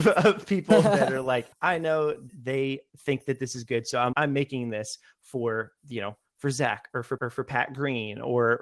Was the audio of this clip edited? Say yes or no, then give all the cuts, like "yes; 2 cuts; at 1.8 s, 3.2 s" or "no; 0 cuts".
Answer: yes; 4 cuts; at 1.5 s, 2.3 s, 4.1 s, 7.2 s